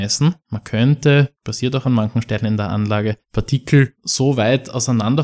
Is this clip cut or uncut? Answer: uncut